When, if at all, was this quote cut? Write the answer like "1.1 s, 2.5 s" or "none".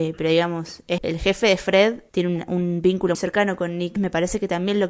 1.0 s, 3.1 s, 4.0 s